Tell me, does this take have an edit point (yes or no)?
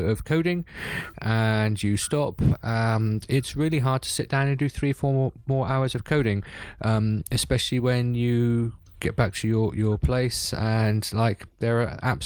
no